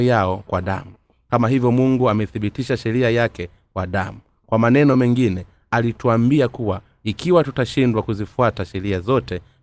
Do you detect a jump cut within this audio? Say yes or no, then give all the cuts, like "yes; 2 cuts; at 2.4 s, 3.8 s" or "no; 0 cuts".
no; 0 cuts